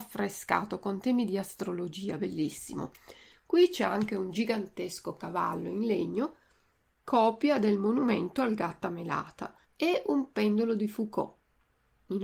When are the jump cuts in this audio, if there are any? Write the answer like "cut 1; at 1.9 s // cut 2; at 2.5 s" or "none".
cut 1; at 9.6 s